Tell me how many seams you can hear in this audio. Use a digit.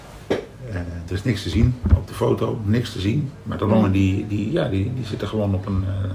1